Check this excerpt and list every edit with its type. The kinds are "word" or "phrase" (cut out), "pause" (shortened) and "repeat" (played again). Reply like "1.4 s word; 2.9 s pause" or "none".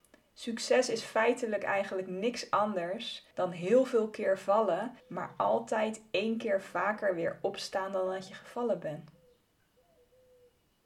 3.3 s pause; 5.0 s pause